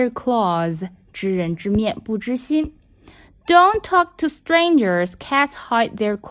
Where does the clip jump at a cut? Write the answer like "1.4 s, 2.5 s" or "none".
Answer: none